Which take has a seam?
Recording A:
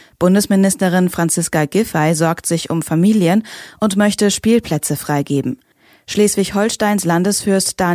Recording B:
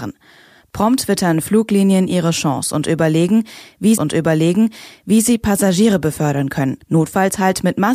B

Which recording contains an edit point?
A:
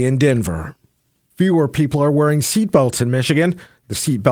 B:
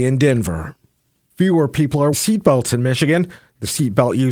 B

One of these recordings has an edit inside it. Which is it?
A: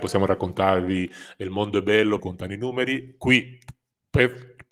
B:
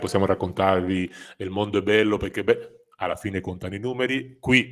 A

